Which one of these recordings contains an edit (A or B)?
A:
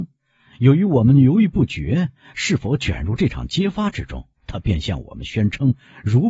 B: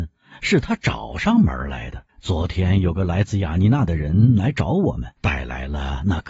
B